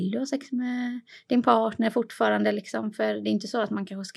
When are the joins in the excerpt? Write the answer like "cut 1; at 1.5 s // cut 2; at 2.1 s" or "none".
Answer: none